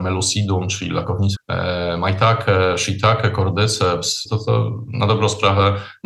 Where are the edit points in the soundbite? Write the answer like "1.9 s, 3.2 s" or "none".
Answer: 1.3 s, 4.3 s

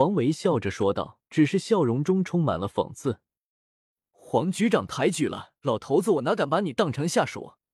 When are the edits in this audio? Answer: 1.3 s, 5.6 s

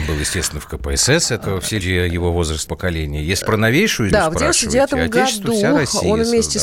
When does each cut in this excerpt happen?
1.4 s, 1.8 s, 2.7 s, 3.4 s, 4.1 s

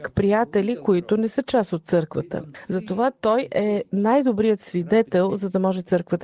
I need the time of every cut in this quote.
none

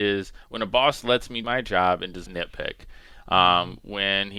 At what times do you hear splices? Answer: 1.4 s, 2.3 s

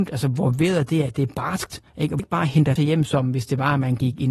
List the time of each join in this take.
1.9 s, 2.2 s, 2.8 s

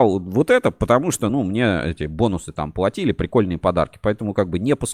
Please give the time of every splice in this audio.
none

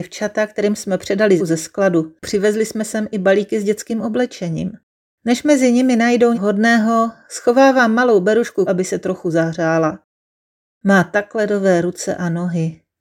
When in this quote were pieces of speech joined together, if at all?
1.4 s, 6.3 s, 8.7 s

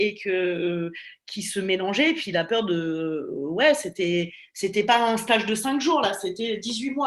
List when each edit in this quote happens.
none

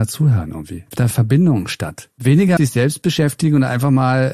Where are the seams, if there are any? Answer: 1.1 s, 2.6 s

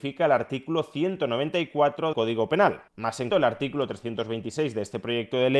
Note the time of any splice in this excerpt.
2.1 s, 2.9 s, 3.3 s

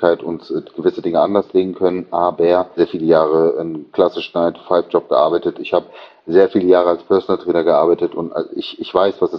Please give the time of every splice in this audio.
2.8 s

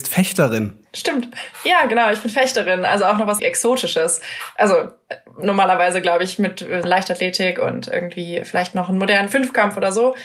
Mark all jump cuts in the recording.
3.4 s, 6.8 s

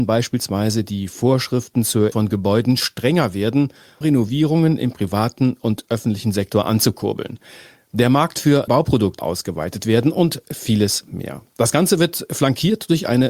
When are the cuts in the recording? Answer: 2.1 s, 4.0 s, 8.7 s, 9.2 s

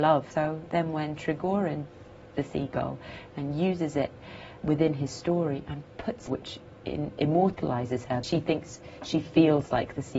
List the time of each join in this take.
2.3 s, 4.6 s, 6.3 s, 8.2 s

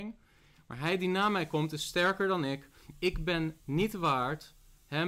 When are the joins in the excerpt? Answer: 3.6 s

